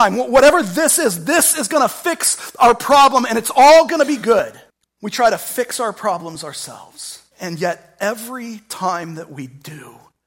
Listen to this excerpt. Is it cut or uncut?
cut